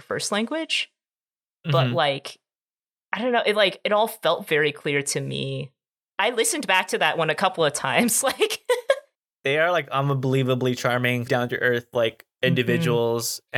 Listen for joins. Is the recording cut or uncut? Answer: cut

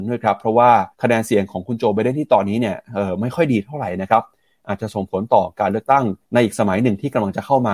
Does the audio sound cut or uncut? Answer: cut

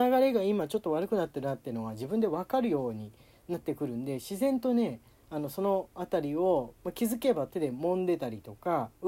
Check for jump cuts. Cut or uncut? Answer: uncut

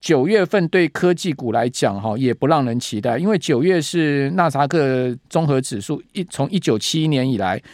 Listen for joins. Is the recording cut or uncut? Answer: cut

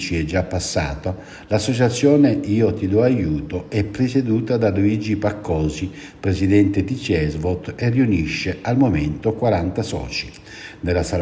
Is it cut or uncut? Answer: uncut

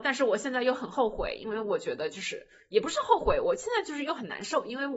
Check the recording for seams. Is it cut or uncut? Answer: uncut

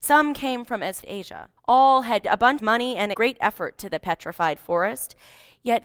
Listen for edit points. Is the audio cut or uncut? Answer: cut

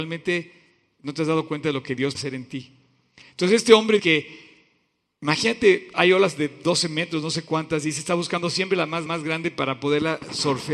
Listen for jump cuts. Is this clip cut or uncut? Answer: cut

